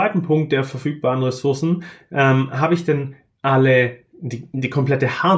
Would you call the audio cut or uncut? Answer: uncut